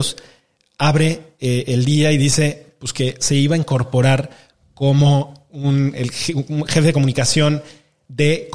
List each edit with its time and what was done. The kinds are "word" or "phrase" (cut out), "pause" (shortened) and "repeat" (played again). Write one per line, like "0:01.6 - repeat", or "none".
none